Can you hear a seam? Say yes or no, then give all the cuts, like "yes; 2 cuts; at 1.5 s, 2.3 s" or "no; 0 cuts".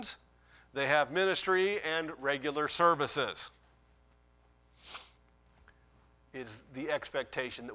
no; 0 cuts